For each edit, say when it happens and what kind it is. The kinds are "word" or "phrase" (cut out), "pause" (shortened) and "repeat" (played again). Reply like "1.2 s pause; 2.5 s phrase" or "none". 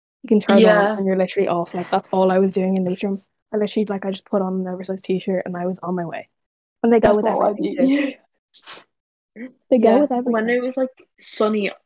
none